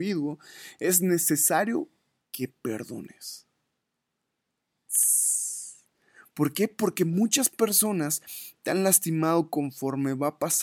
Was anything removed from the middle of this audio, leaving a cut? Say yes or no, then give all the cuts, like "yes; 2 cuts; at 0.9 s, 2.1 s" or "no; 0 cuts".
no; 0 cuts